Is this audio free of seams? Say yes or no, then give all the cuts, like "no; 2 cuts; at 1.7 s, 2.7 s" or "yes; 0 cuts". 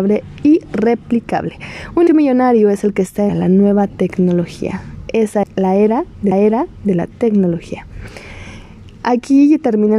no; 4 cuts; at 2.1 s, 3.3 s, 5.4 s, 6.3 s